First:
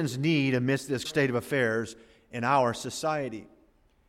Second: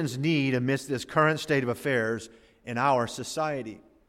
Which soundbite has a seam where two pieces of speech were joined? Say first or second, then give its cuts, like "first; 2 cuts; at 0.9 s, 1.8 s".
first; 1 cut; at 1.0 s